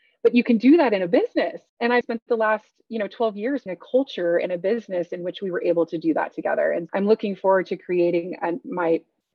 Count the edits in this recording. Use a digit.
4